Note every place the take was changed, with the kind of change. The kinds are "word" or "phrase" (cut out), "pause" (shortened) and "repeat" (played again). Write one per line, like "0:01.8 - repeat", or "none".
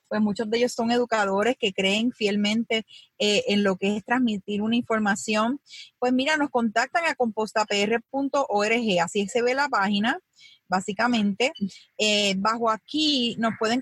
none